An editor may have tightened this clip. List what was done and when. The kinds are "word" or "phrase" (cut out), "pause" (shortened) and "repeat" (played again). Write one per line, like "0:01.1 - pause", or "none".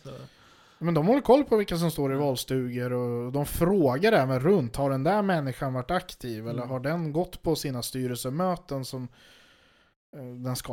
none